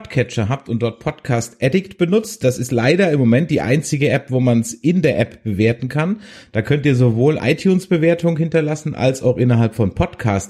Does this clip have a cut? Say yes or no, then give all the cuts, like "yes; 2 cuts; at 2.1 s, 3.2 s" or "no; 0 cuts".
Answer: yes; 1 cut; at 7.4 s